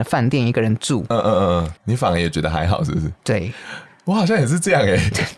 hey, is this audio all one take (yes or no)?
no